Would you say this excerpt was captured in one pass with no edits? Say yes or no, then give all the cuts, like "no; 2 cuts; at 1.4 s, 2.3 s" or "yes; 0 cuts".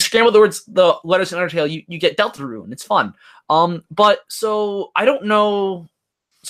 yes; 0 cuts